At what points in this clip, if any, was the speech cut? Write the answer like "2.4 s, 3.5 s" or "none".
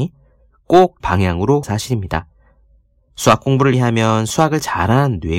1.0 s, 1.6 s, 3.7 s